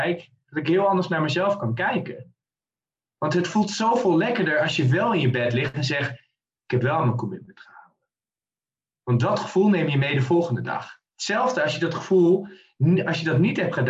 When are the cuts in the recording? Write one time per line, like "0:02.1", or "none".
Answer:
none

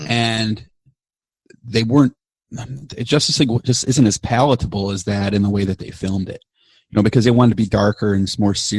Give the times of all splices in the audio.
none

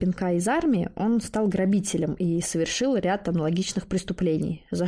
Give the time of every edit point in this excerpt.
none

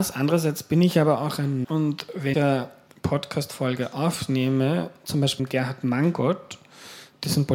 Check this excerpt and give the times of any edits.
0:01.6
0:02.3
0:05.4

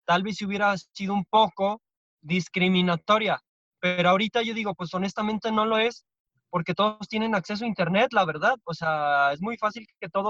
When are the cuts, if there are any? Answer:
none

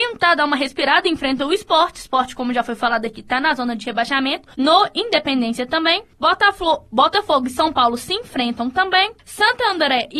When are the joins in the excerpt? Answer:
0:04.5
0:06.1
0:09.2

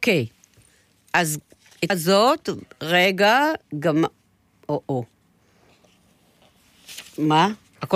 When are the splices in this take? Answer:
0:01.9
0:03.7

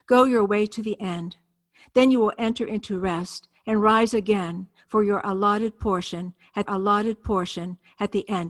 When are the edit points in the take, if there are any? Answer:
0:06.7

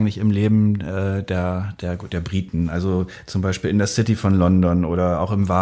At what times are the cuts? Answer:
none

